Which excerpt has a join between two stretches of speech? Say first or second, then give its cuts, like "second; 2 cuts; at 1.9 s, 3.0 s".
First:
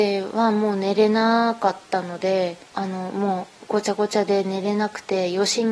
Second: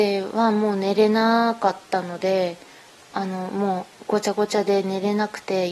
first; 1 cut; at 2.7 s